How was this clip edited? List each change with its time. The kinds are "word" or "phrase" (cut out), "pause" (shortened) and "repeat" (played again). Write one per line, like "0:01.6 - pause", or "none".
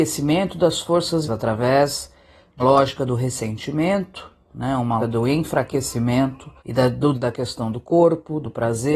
0:01.3 - word
0:02.6 - word
0:05.0 - word
0:06.6 - pause
0:07.1 - word